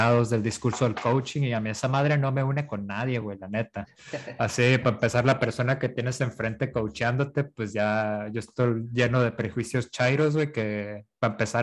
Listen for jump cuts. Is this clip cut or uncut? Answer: uncut